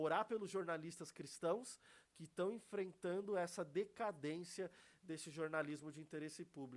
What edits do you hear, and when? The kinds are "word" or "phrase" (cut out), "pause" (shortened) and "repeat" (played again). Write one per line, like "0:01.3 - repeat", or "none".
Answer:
none